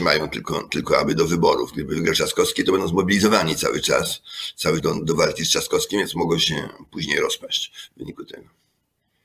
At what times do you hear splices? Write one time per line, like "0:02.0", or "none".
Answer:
0:04.8

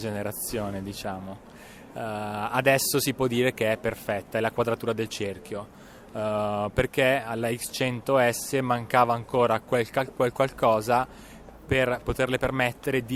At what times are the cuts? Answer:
none

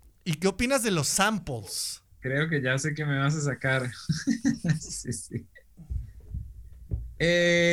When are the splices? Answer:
none

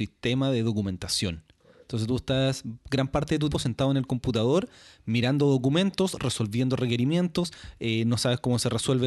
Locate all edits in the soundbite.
0:03.5

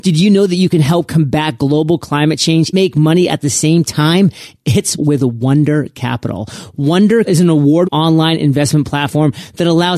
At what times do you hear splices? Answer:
0:02.7
0:05.0
0:07.2
0:07.8

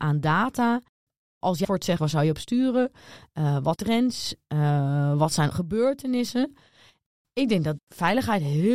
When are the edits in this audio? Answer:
0:01.6
0:02.0
0:03.8
0:05.5
0:07.8

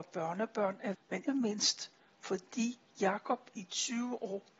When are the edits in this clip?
0:00.9
0:01.3

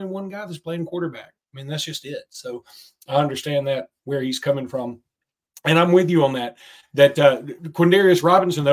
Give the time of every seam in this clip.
none

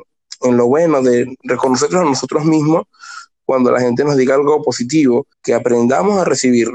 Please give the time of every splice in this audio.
0:05.3

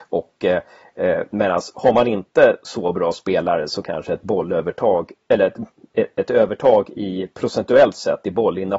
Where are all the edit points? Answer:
none

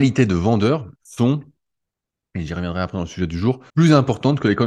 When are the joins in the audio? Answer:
0:01.0
0:03.7

